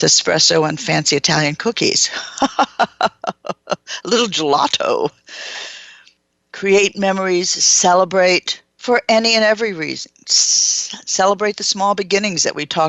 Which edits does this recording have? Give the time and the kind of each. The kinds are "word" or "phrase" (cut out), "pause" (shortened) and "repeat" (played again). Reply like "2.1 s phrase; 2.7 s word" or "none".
6.2 s pause; 8.7 s pause

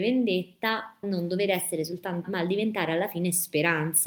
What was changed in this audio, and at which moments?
1.0 s word; 2.2 s word

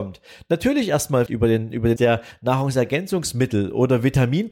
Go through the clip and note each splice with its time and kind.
1.3 s word; 2.0 s word

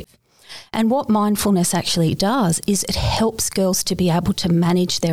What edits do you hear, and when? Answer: none

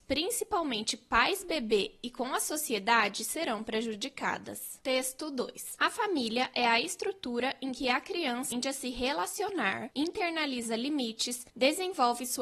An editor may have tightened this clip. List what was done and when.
8.5 s word

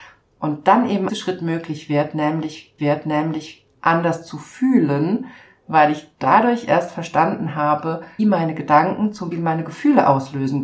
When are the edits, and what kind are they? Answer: 1.1 s phrase; 2.8 s repeat; 8.2 s word; 9.3 s word

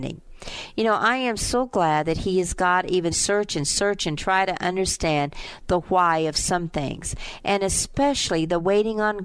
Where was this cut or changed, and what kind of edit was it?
3.1 s phrase

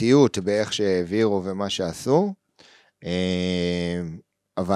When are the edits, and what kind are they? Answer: none

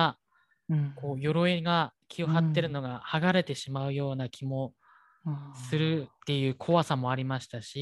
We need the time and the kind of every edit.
2.0 s pause

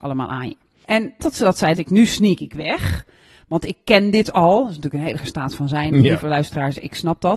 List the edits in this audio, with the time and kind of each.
1.2 s word; 1.8 s word; 5.2 s word

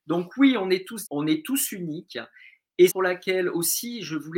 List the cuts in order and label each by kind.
1.0 s word; 2.9 s phrase

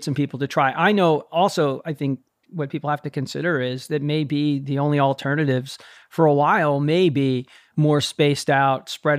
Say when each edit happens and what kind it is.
none

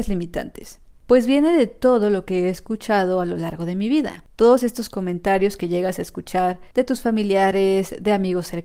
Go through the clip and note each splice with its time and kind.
6.7 s pause

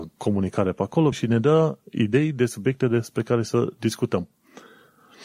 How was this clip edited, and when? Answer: 1.1 s word

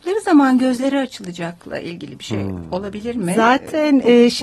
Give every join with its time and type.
none

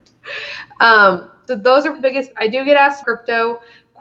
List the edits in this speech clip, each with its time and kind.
1.5 s word; 1.9 s word; 2.3 s word; 3.0 s word

